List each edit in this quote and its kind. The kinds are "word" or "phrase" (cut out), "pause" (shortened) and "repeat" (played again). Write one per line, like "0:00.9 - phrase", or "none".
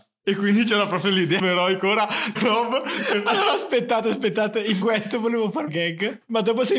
0:01.4 - phrase
0:02.4 - word
0:04.8 - word
0:05.7 - word